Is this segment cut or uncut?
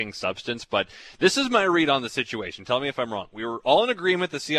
uncut